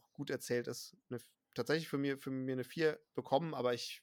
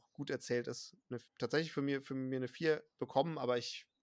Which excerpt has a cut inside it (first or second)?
second